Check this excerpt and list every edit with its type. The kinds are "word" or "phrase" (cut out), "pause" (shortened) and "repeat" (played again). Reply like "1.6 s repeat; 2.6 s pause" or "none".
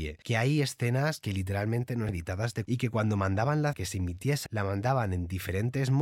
2.1 s word; 2.6 s word; 3.7 s word; 4.5 s word

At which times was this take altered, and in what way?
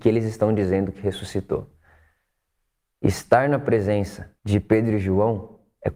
4.4 s pause

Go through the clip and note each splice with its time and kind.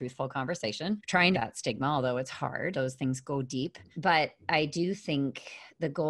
1.0 s word; 1.3 s phrase; 2.7 s word; 3.9 s pause

